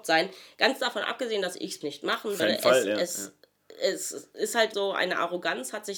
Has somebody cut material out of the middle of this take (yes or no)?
yes